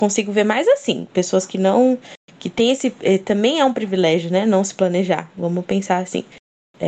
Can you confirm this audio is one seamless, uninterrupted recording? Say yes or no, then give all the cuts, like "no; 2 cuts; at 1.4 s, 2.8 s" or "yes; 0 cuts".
yes; 0 cuts